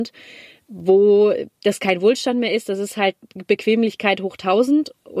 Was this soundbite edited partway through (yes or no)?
no